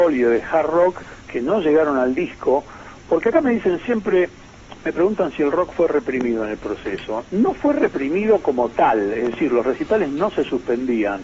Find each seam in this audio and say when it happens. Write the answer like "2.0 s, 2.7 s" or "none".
none